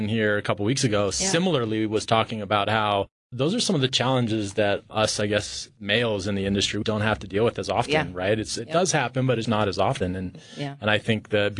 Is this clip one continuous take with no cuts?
no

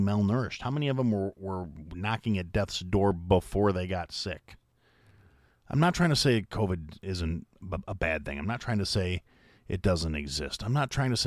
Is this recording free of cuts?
yes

